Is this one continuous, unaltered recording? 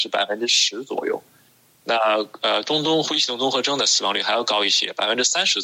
yes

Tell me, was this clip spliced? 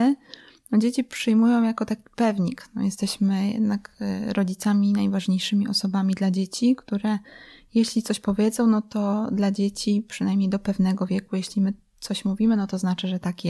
no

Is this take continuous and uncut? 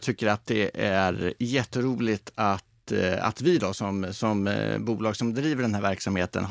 yes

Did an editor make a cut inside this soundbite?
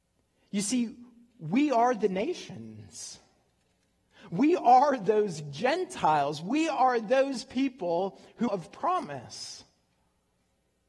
yes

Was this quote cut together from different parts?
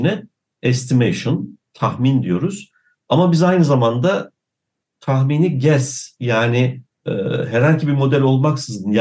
no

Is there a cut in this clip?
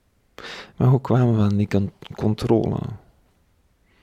no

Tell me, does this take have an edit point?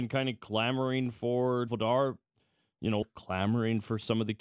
yes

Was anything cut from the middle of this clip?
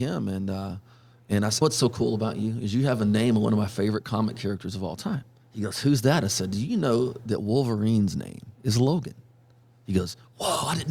yes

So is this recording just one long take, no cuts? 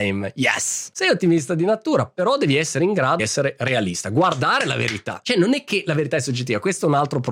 no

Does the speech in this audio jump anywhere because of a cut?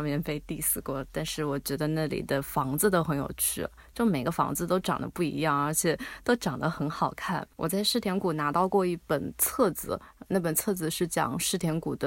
yes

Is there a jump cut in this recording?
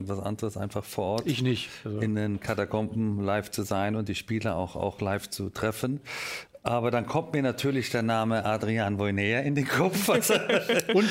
no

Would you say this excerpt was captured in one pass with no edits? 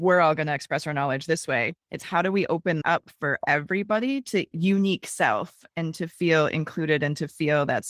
no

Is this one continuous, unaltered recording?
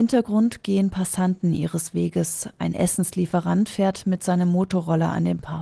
yes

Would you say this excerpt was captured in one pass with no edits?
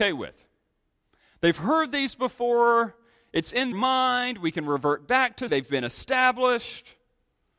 no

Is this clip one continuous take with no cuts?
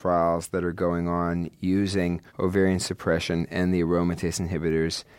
no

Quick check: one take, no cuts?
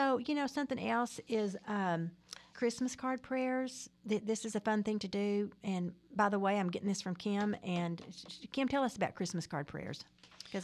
no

